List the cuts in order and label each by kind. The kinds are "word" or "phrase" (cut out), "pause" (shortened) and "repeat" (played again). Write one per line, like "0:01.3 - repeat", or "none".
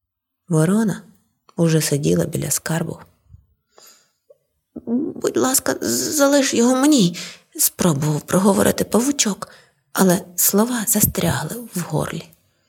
none